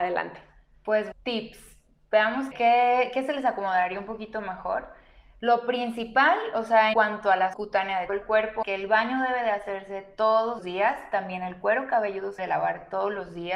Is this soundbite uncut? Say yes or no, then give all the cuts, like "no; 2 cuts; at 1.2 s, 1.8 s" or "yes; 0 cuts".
no; 8 cuts; at 1.1 s, 2.5 s, 6.9 s, 7.5 s, 8.1 s, 8.6 s, 10.6 s, 12.4 s